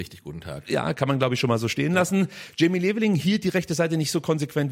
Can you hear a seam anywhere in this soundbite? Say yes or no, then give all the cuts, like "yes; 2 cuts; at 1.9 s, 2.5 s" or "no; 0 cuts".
no; 0 cuts